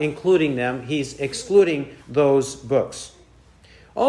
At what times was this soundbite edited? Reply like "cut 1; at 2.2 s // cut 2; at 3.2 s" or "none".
cut 1; at 2.0 s